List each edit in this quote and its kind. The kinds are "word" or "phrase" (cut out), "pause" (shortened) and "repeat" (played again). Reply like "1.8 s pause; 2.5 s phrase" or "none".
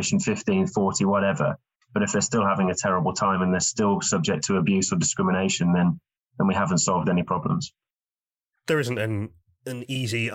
none